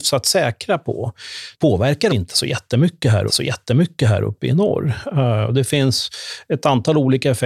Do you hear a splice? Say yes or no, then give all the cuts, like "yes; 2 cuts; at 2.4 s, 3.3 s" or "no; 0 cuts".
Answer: yes; 3 cuts; at 1.5 s, 2.1 s, 3.3 s